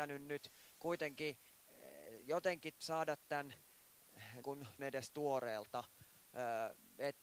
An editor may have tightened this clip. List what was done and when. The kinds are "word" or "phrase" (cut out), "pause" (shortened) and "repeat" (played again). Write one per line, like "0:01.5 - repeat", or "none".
0:02.8 - pause
0:04.4 - word
0:04.8 - word